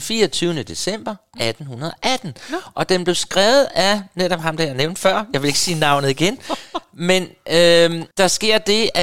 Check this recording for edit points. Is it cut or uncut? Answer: cut